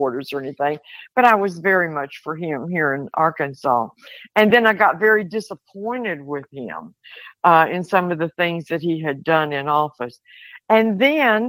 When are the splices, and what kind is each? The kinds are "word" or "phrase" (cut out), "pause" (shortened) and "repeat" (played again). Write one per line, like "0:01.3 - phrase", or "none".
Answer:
none